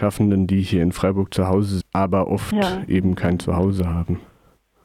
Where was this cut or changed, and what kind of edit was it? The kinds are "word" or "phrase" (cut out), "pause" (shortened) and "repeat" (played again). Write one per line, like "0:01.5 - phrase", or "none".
0:01.8 - word